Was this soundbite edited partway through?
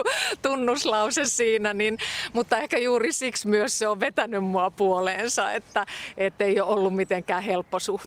no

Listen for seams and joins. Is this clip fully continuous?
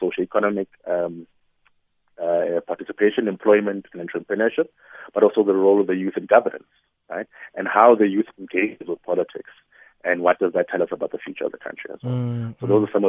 yes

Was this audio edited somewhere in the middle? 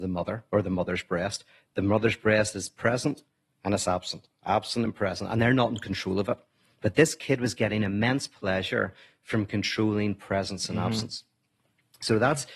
no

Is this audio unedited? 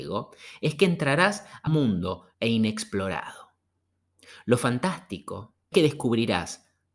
no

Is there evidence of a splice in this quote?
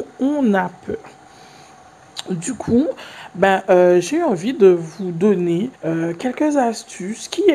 yes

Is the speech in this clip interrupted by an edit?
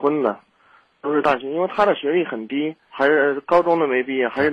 yes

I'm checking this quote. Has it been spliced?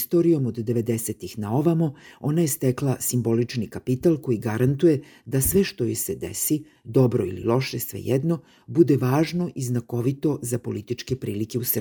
no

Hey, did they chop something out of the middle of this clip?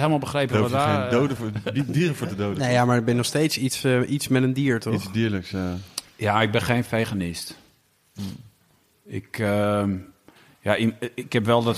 no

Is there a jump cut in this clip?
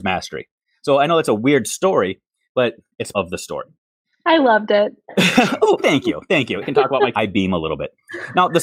yes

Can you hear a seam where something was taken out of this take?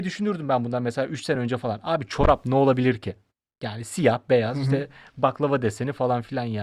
no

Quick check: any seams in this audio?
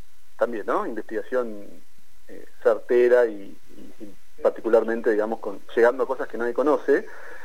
yes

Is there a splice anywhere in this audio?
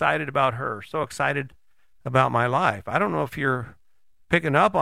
no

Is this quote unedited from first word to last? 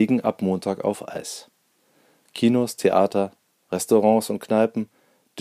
yes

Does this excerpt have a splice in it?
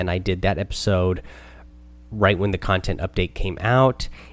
no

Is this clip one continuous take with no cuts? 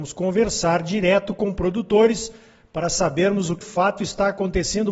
no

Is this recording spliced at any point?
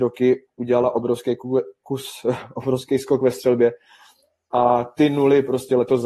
no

